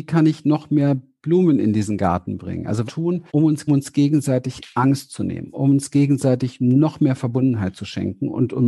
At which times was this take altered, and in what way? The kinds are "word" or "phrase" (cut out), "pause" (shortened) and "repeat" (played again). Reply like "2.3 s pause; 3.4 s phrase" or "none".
2.9 s phrase; 3.3 s pause; 3.7 s phrase